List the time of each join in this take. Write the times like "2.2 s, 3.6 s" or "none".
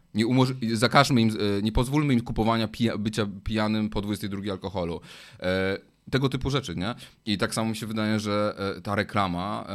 none